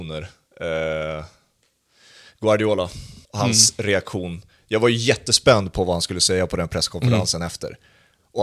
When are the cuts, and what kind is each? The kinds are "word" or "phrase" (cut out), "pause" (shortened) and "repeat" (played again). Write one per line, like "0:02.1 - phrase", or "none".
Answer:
0:03.2 - pause